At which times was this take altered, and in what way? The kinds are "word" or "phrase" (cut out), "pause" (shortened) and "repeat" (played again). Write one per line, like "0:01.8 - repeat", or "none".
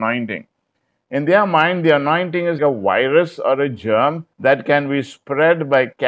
0:02.6 - word
0:04.3 - pause